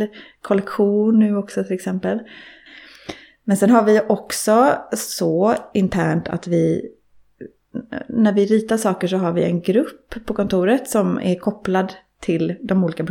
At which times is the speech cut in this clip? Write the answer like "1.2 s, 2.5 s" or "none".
none